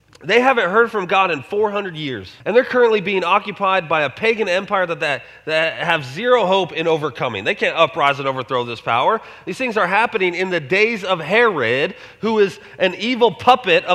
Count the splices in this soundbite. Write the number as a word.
one